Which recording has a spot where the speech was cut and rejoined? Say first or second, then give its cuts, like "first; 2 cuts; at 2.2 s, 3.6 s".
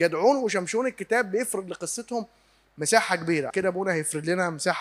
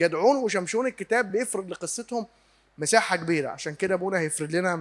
first; 1 cut; at 3.5 s